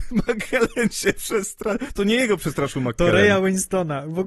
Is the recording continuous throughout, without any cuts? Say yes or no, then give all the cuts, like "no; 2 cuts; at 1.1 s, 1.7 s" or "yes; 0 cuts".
yes; 0 cuts